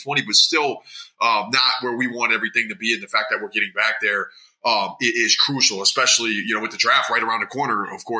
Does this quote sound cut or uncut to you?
uncut